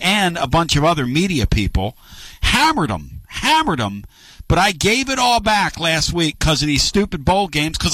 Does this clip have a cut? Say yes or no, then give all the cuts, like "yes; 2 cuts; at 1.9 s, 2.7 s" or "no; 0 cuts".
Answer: no; 0 cuts